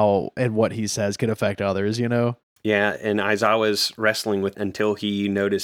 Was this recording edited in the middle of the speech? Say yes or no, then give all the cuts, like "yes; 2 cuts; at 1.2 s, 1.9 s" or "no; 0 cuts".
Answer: yes; 2 cuts; at 2.6 s, 4.5 s